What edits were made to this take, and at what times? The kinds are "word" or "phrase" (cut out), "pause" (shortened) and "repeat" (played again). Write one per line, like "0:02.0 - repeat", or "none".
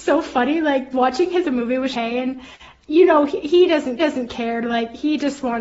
0:00.9 - word
0:01.4 - phrase
0:01.9 - word
0:04.0 - repeat